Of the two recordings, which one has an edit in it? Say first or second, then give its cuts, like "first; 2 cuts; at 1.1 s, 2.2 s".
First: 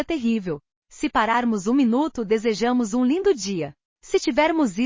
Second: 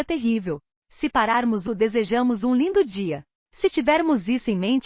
second; 1 cut; at 1.7 s